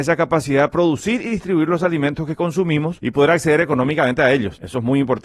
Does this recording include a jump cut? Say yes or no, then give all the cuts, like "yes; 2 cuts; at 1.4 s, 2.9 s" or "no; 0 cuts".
no; 0 cuts